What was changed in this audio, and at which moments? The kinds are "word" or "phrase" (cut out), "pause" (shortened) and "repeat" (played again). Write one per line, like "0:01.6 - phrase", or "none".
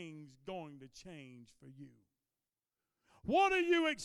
none